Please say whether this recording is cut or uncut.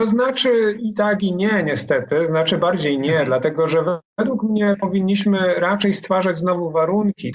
uncut